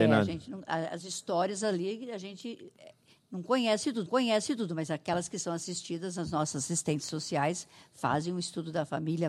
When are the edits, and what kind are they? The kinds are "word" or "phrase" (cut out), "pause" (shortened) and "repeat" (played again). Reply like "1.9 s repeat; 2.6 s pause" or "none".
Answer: 4.1 s repeat